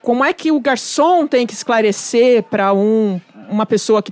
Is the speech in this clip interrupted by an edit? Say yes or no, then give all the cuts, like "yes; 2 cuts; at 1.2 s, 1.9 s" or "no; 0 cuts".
no; 0 cuts